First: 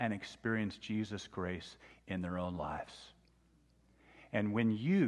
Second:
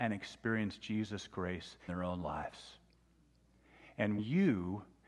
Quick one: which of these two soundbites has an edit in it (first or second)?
second